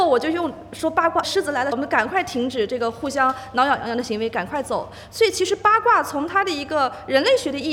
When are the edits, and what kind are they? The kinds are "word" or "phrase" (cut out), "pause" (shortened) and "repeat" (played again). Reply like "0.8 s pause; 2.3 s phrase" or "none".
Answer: 1.2 s word; 1.7 s phrase

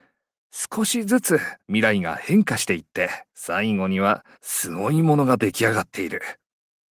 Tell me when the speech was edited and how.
1.6 s pause; 3.3 s pause; 4.3 s pause

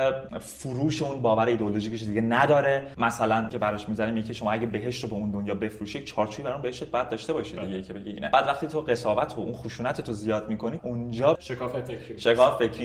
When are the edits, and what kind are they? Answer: 3.5 s word; 10.8 s word; 11.3 s word

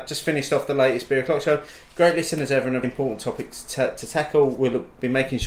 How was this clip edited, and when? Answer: 2.8 s word

